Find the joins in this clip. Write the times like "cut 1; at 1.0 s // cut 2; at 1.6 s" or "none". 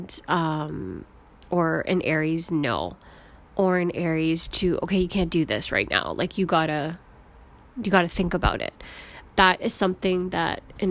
none